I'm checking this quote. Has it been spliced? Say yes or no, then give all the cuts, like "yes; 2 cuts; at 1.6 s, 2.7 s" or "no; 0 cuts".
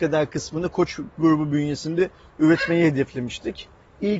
no; 0 cuts